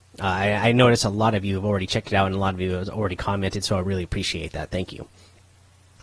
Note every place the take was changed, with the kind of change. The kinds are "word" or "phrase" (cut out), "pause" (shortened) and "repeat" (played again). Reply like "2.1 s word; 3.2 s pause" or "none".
none

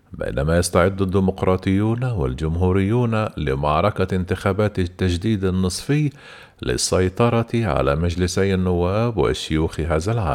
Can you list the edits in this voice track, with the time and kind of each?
none

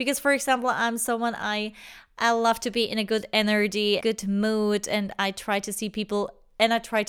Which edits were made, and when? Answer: 4.0 s word

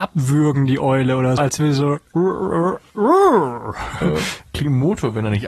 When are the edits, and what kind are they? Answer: 1.4 s word; 2.9 s pause

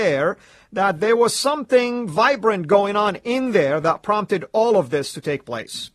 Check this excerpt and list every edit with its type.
none

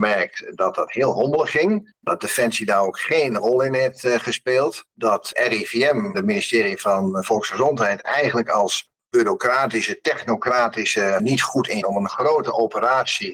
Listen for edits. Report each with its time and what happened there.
4.9 s pause; 6.1 s word; 11.2 s word; 11.8 s phrase

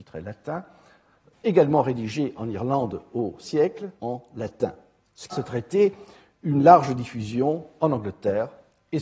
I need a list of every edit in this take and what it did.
1.3 s word; 3.4 s word; 4.0 s word; 5.3 s word

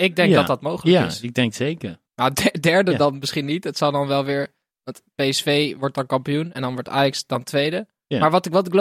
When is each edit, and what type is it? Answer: 2.1 s pause; 4.7 s pause

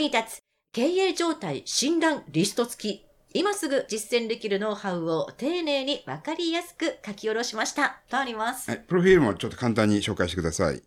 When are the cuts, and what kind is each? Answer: none

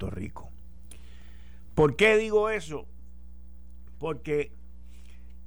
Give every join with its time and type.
none

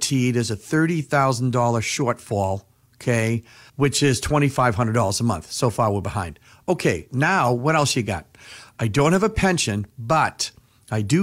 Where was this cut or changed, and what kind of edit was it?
none

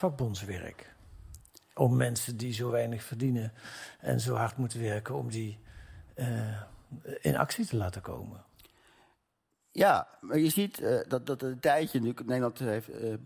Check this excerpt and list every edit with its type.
none

